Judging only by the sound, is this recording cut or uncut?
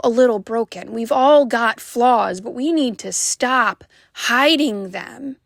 uncut